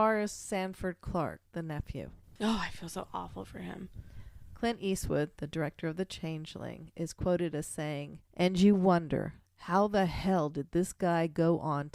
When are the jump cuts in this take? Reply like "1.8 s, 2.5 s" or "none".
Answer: 1.5 s, 8.2 s, 9.5 s